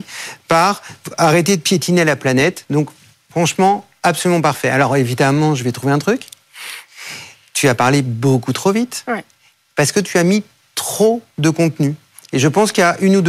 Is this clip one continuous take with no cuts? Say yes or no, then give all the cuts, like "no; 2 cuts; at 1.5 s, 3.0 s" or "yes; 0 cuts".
yes; 0 cuts